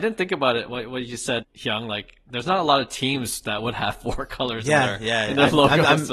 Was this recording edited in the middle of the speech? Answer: yes; 1 cut; at 1.4 s

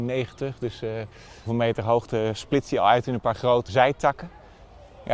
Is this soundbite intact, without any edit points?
no; 2 cuts; at 1.5 s, 3.7 s

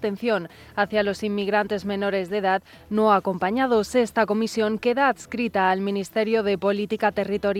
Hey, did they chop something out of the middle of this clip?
no; 0 cuts

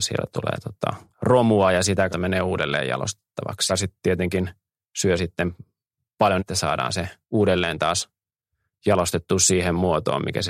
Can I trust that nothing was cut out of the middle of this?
no; 5 cuts; at 1.1 s, 2.1 s, 3.7 s, 6.4 s, 7.2 s

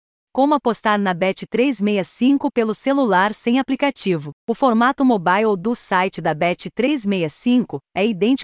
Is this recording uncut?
no; 1 cut; at 4.4 s

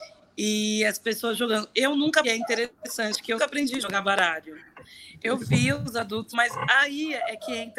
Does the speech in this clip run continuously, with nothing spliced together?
no; 3 cuts; at 2.2 s, 3.4 s, 6.3 s

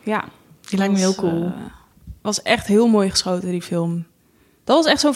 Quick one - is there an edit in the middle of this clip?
yes; 1 cut; at 2.2 s

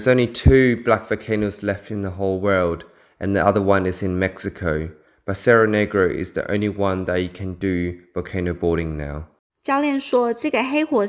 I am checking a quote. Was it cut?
no; 0 cuts

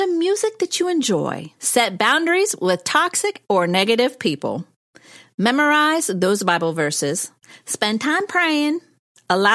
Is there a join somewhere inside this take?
yes; 1 cut; at 1.6 s

